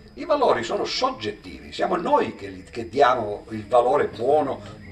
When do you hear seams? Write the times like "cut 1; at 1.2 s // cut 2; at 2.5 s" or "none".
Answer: none